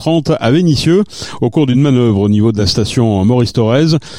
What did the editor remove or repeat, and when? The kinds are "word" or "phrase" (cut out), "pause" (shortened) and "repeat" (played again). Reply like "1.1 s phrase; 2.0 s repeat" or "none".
none

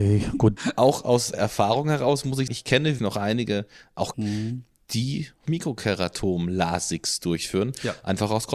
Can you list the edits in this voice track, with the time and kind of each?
1.3 s word; 2.5 s word; 3.0 s word; 4.1 s word; 5.5 s word

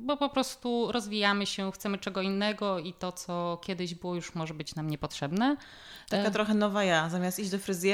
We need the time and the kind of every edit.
none

